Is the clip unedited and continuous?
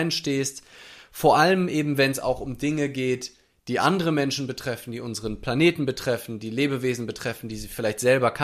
yes; 0 cuts

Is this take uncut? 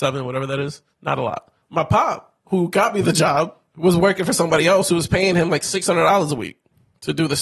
no; 3 cuts; at 0.9 s, 1.6 s, 2.4 s

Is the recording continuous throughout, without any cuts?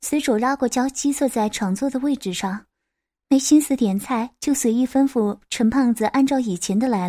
yes; 0 cuts

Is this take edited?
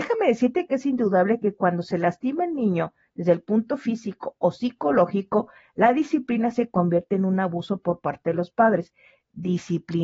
no; 0 cuts

